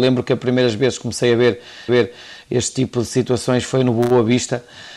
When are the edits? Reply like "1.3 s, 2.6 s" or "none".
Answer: 1.9 s